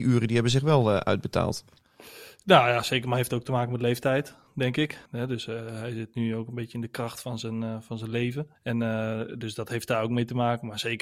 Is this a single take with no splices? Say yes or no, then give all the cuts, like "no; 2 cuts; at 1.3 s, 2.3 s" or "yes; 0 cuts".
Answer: no; 2 cuts; at 5.1 s, 8.6 s